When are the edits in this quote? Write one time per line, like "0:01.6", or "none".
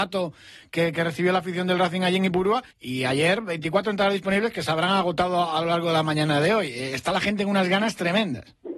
0:02.7